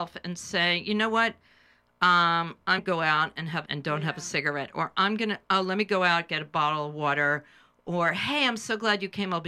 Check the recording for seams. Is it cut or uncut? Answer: cut